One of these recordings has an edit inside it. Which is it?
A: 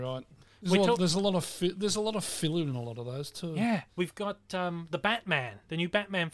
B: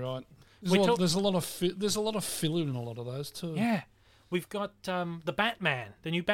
A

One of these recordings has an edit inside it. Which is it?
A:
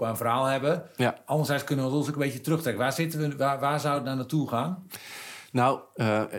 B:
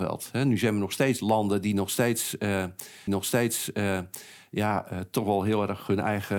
B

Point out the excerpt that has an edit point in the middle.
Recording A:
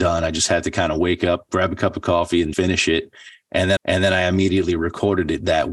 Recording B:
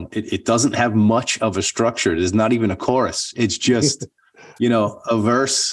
A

